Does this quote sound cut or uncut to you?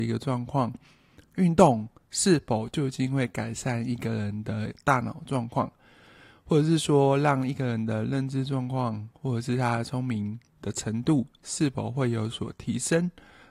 uncut